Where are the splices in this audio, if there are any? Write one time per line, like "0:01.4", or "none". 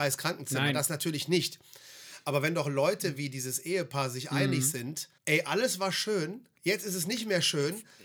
0:05.2
0:06.6

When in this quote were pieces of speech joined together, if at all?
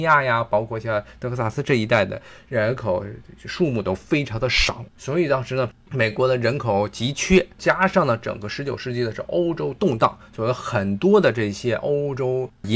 0:04.9
0:05.8
0:07.5

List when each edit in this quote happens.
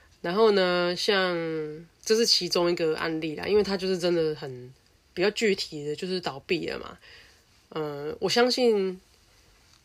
0:05.0

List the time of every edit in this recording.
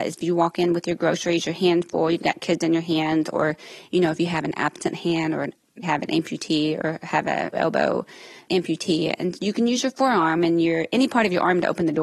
0:05.8
0:07.5

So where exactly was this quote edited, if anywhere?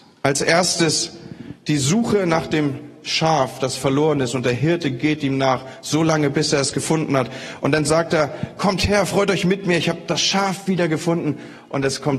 none

